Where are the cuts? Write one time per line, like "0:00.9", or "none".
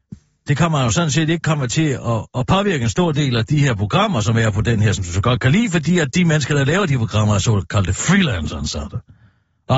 none